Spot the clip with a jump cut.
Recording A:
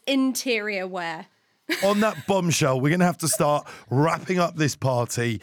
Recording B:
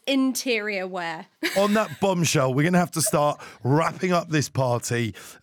B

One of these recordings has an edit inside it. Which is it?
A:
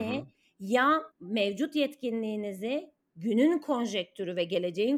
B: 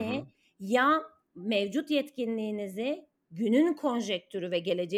A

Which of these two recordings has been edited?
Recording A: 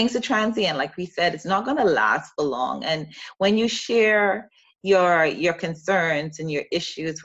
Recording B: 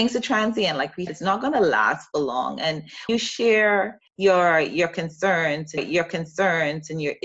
B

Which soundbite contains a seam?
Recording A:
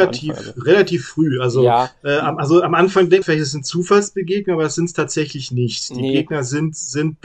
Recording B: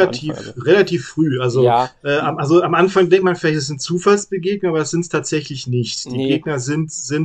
A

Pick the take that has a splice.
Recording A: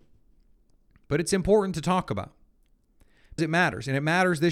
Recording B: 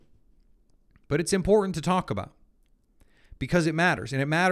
A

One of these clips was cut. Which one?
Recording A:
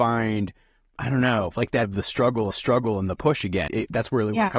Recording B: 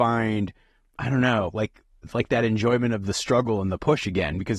A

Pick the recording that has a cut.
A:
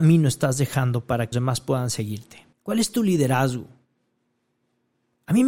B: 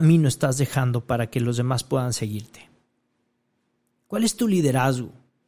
A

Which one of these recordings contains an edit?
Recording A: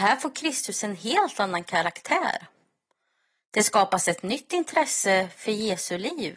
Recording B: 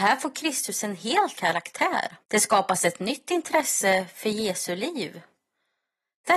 B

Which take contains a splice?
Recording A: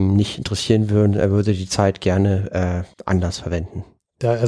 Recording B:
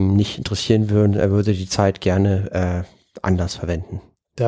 A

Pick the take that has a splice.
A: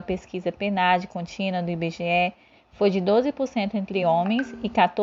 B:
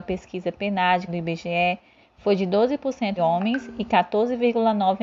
B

